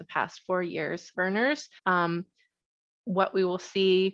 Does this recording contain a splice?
yes; 2 cuts; at 1.1 s, 1.8 s

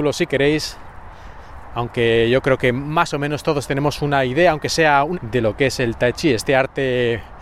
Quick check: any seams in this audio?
yes; 1 cut; at 5.1 s

